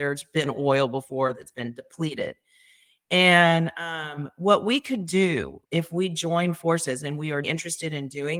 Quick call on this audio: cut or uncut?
cut